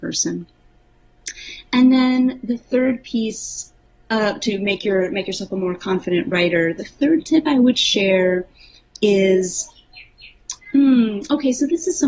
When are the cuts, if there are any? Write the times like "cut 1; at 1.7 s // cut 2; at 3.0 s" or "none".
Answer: none